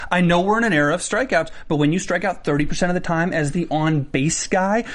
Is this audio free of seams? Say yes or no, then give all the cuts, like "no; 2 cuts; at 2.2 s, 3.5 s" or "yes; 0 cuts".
yes; 0 cuts